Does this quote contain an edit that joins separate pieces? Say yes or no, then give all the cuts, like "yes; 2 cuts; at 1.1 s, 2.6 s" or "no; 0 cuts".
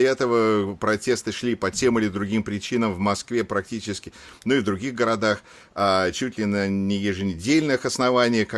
no; 0 cuts